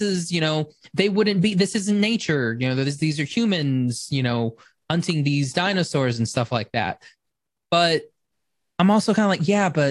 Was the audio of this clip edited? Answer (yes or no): no